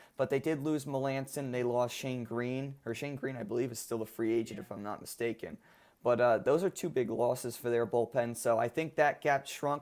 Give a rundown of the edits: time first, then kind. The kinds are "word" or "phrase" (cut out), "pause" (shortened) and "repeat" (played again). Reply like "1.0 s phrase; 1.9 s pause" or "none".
none